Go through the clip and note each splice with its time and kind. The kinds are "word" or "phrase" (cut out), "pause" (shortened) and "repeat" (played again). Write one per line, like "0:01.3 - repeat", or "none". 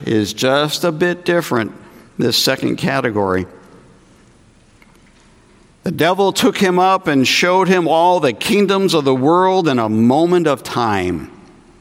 none